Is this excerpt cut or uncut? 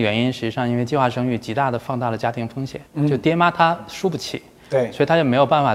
cut